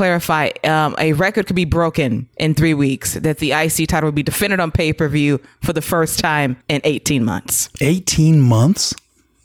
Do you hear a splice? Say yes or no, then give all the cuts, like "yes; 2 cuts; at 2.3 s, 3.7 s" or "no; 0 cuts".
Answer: yes; 2 cuts; at 2.3 s, 6.6 s